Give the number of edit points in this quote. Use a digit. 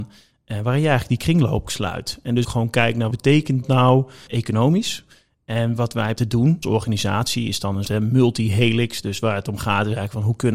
8